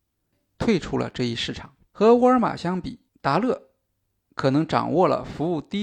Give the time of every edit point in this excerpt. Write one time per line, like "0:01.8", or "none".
0:01.9
0:03.1